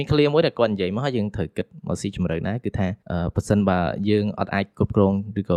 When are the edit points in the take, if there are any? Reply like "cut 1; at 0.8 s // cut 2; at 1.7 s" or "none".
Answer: cut 1; at 3.0 s